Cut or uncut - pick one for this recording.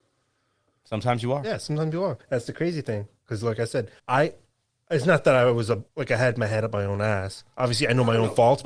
cut